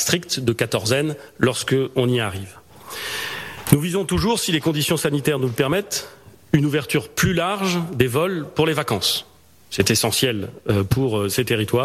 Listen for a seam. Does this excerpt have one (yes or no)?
no